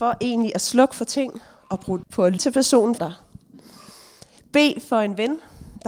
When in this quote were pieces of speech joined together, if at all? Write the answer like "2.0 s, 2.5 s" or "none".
2.0 s, 2.4 s, 3.0 s